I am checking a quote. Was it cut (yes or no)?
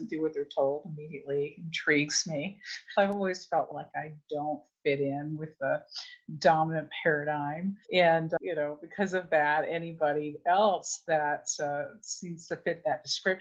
yes